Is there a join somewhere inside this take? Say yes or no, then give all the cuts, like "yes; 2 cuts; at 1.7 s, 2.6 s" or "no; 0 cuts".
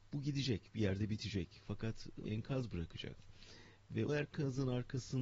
yes; 2 cuts; at 2.2 s, 4.1 s